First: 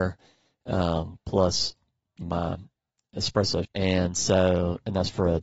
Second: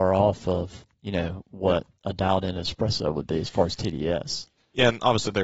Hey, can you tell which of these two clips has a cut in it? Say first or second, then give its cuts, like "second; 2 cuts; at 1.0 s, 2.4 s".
first; 2 cuts; at 2.2 s, 3.6 s